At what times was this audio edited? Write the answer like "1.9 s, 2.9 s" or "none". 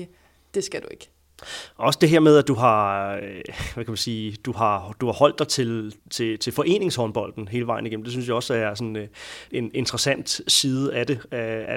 6.0 s, 9.5 s